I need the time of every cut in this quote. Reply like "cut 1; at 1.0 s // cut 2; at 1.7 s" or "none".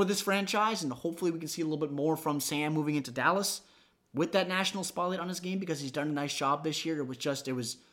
none